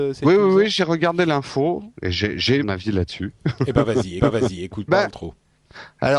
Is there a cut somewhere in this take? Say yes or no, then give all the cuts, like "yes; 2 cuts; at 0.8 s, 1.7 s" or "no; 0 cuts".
yes; 4 cuts; at 1.9 s, 2.6 s, 4.2 s, 4.9 s